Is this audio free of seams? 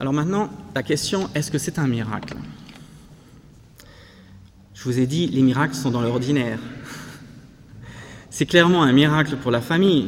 yes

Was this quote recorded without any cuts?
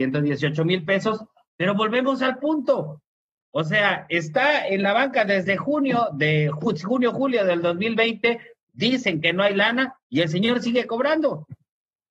yes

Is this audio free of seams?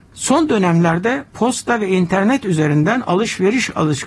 yes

